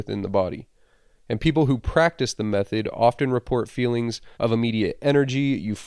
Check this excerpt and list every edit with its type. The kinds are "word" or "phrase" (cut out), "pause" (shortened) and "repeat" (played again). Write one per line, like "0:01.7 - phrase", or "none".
0:04.3 - pause